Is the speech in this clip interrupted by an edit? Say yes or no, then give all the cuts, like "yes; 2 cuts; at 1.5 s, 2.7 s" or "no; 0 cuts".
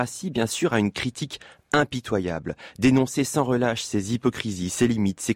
no; 0 cuts